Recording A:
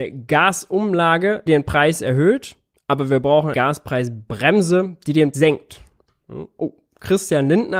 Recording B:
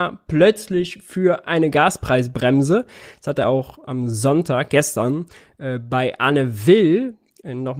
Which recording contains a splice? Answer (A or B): A